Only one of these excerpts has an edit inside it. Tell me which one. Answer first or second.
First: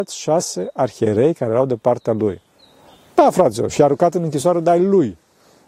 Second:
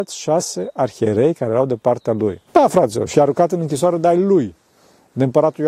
second